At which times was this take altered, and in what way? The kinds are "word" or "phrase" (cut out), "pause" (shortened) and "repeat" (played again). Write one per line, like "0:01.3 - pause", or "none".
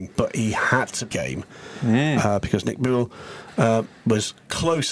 0:01.1 - phrase